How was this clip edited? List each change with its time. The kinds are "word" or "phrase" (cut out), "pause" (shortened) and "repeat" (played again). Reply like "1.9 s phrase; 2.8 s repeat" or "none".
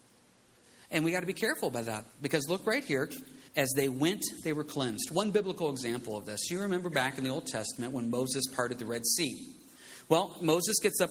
3.5 s pause